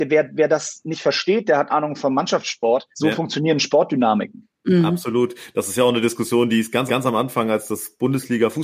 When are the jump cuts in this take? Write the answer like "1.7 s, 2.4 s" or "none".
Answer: 1.7 s, 2.9 s, 6.9 s